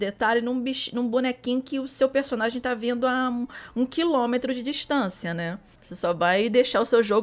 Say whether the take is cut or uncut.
uncut